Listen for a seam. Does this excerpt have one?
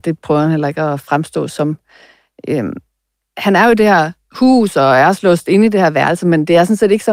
no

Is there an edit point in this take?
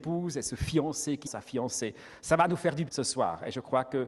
yes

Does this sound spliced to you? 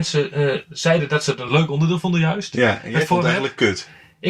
no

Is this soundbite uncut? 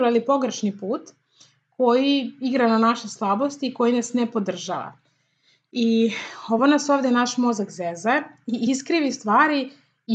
yes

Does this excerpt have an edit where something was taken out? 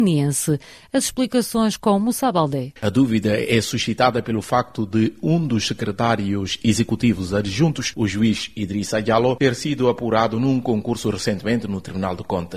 yes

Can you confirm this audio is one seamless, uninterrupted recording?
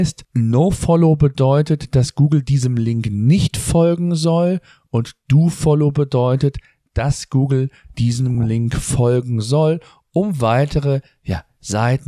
yes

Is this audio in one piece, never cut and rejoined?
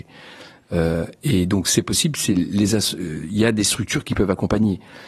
yes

